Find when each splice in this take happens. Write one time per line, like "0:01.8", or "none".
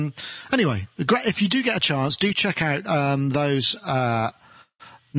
none